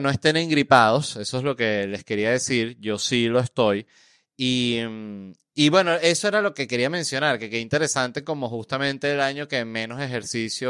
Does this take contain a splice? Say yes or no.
no